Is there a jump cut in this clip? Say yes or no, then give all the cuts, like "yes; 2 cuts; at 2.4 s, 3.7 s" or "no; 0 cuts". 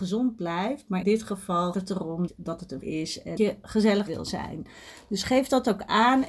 yes; 6 cuts; at 1.0 s, 1.7 s, 2.3 s, 2.8 s, 3.4 s, 4.1 s